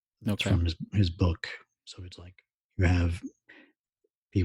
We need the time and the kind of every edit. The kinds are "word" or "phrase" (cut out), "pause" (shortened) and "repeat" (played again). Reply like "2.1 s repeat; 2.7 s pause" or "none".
none